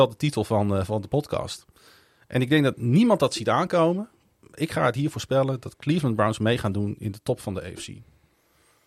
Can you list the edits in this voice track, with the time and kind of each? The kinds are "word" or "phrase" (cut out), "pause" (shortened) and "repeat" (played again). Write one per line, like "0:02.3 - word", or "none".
none